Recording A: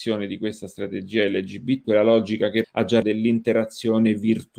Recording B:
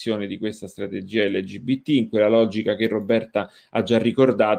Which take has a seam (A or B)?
A